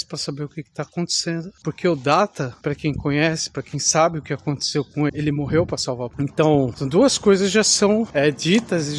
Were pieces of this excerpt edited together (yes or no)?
yes